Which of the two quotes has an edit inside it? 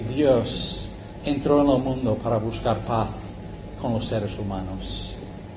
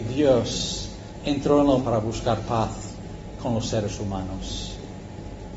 second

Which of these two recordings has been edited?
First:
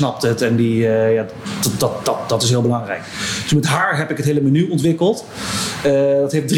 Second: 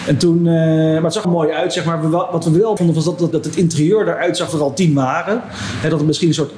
second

